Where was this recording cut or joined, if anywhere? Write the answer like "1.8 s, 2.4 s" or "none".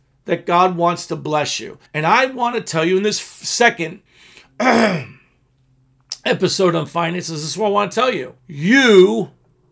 1.9 s, 4.1 s, 8.4 s